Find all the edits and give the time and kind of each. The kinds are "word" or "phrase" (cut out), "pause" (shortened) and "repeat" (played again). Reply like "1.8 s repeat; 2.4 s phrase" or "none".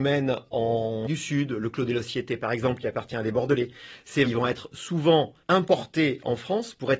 1.1 s word; 4.3 s word; 5.4 s pause